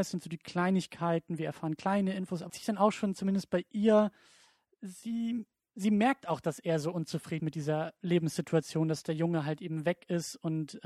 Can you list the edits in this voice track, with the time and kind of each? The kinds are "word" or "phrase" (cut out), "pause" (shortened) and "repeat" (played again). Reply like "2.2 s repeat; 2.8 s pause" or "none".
2.5 s phrase; 7.4 s word

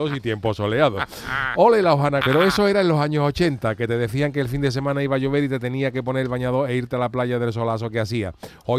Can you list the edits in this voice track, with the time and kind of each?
2.2 s word

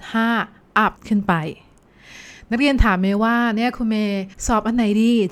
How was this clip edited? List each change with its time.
1.0 s pause; 4.3 s pause

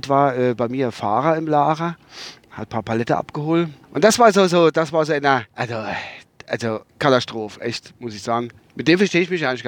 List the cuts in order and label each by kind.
3.8 s pause; 5.5 s pause; 6.9 s pause; 8.6 s pause

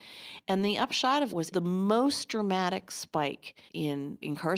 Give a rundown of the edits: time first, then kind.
1.3 s word; 3.7 s pause

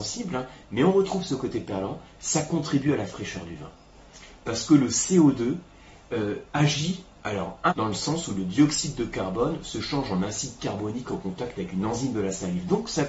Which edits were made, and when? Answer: 7.7 s phrase

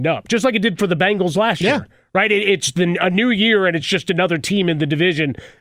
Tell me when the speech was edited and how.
none

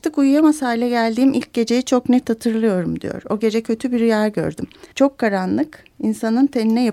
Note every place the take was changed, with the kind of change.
4.9 s pause

